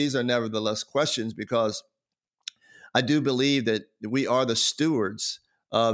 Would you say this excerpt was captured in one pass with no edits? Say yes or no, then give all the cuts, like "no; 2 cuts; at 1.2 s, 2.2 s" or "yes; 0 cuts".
yes; 0 cuts